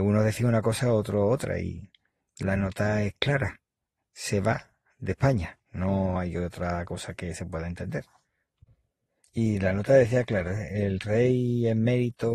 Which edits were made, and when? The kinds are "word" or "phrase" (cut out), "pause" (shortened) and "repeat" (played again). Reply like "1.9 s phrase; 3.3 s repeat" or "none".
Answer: none